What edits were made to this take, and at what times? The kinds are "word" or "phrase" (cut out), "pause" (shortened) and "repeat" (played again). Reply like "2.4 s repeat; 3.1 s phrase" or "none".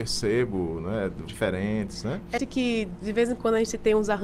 1.3 s word; 2.4 s word